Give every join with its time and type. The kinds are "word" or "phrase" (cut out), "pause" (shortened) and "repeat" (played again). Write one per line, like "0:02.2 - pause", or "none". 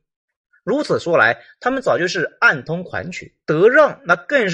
0:03.4 - pause